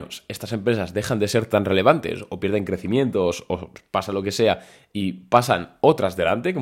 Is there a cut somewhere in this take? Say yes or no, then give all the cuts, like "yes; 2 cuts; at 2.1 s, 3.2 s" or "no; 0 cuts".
no; 0 cuts